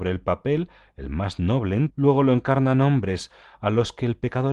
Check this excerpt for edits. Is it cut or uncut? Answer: cut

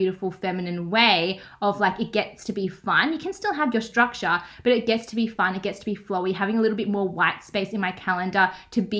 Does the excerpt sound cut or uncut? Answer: uncut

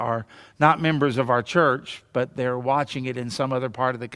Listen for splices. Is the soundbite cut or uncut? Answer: uncut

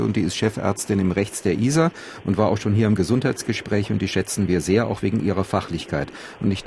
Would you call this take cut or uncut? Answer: uncut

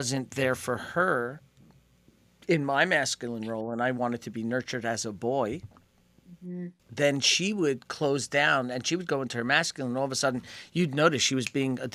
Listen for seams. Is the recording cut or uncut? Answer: cut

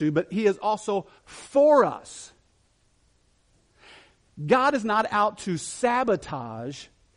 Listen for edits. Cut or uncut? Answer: cut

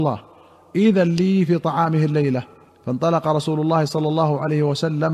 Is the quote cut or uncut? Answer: cut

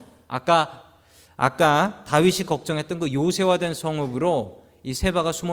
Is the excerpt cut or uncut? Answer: uncut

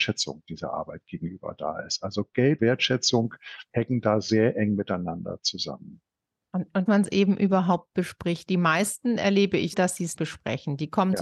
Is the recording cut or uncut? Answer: cut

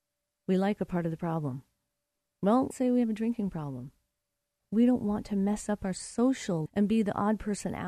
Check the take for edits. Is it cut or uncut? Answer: cut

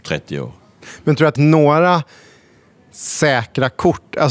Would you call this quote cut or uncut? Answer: cut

